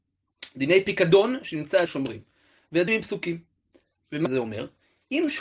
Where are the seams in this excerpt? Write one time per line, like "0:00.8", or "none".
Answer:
0:01.9
0:02.9
0:04.3